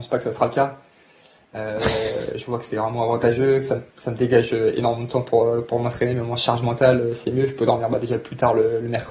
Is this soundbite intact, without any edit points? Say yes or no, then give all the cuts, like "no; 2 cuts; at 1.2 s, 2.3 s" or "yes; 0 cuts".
no; 1 cut; at 3.9 s